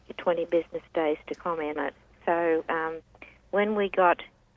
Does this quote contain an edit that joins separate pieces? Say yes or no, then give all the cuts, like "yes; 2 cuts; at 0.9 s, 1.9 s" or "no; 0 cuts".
yes; 1 cut; at 1.8 s